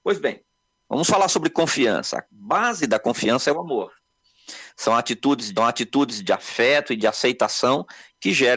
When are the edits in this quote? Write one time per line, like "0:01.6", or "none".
0:05.6